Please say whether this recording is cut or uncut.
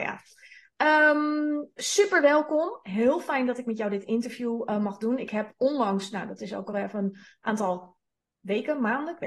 uncut